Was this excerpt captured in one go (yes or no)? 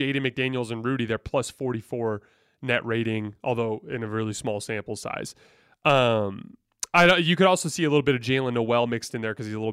yes